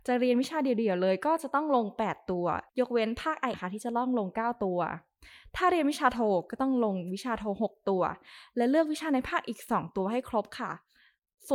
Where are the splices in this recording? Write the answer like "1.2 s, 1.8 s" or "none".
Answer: 2.7 s, 3.5 s